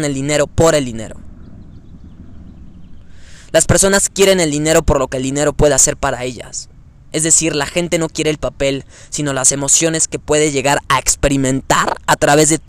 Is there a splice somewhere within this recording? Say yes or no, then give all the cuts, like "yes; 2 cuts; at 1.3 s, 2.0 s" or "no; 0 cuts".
no; 0 cuts